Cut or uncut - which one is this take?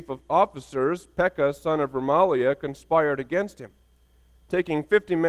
uncut